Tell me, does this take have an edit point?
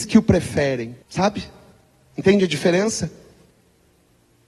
yes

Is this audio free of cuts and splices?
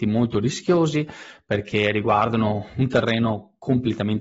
yes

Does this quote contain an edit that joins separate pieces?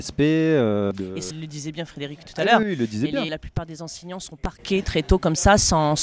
yes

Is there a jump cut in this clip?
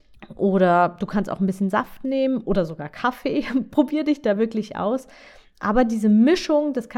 no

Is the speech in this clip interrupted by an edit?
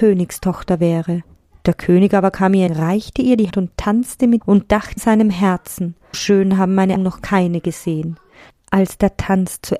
yes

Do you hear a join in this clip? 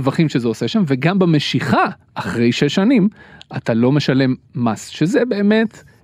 yes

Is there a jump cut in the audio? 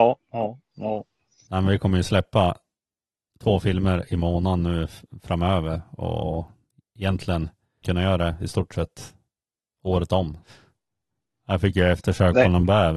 yes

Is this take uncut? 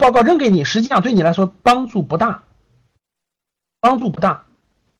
yes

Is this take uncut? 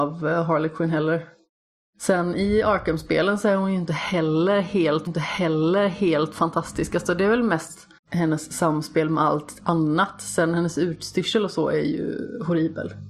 no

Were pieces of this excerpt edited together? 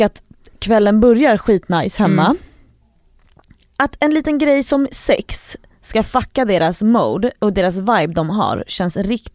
no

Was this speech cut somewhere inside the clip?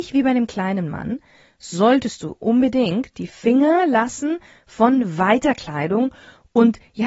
no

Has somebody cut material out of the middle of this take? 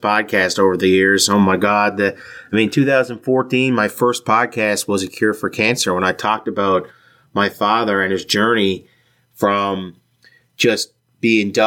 no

